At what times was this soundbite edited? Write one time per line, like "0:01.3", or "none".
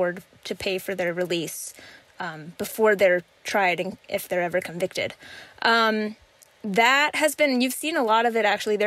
none